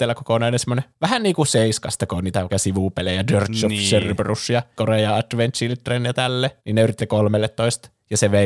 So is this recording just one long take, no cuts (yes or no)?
no